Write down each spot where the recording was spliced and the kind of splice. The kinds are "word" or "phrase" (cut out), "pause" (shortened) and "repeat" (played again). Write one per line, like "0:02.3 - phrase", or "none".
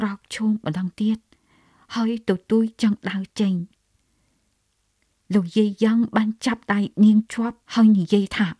0:07.6 - pause